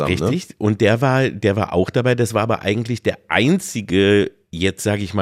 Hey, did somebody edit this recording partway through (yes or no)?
no